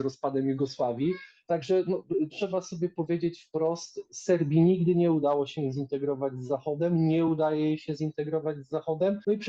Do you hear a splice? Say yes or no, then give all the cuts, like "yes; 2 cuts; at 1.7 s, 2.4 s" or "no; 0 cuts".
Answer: no; 0 cuts